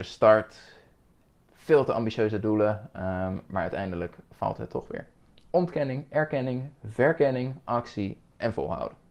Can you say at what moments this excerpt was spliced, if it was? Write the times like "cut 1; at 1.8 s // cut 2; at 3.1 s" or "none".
none

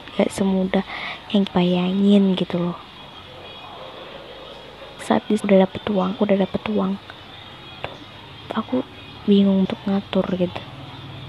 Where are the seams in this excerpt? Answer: cut 1; at 1.5 s // cut 2; at 5.0 s // cut 3; at 5.4 s // cut 4; at 6.2 s // cut 5; at 7.8 s // cut 6; at 9.6 s

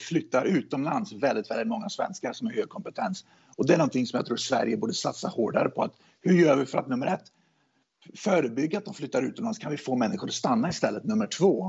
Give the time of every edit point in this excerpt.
none

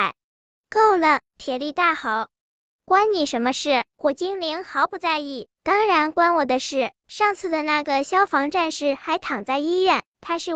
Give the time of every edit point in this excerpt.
none

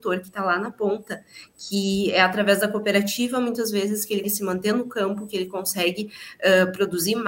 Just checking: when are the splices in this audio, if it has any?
cut 1; at 4.2 s

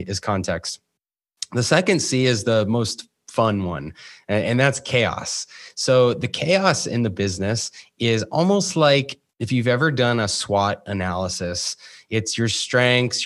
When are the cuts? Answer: none

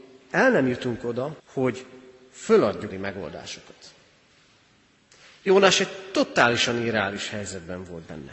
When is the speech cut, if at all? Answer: cut 1; at 1.4 s // cut 2; at 2.9 s

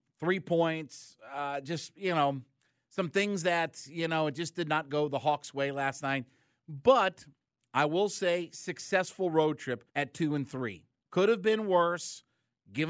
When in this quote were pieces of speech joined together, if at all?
cut 1; at 9.9 s

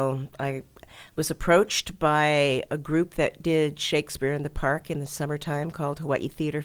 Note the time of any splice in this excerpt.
none

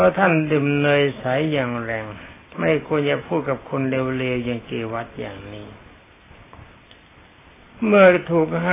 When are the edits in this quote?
none

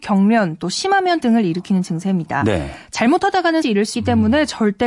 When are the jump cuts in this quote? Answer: cut 1; at 1.2 s // cut 2; at 3.6 s // cut 3; at 3.9 s

